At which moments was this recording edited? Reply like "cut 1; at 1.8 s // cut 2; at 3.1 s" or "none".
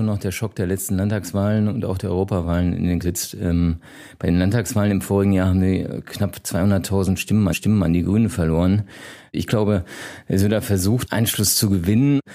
cut 1; at 3.0 s // cut 2; at 7.5 s // cut 3; at 11.1 s